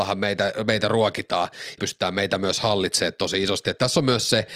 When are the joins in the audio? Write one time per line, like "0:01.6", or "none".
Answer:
0:01.8